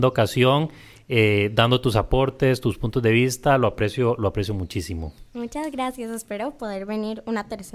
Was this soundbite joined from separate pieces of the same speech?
no; 0 cuts

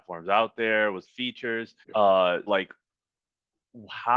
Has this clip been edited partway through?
yes; 3 cuts; at 1.0 s, 1.8 s, 2.5 s

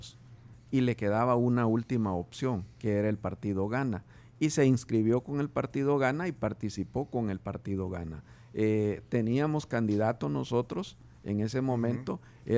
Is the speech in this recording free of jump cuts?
yes; 0 cuts

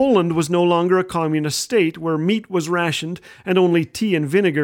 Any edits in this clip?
no; 0 cuts

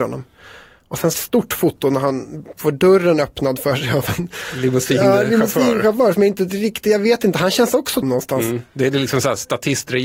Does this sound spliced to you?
yes; 2 cuts; at 1.1 s, 8.0 s

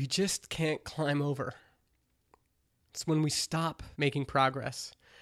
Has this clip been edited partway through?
yes; 1 cut; at 3.9 s

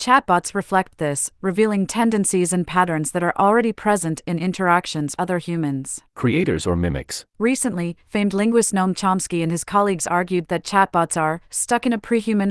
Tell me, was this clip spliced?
yes; 3 cuts; at 5.2 s, 6.1 s, 7.3 s

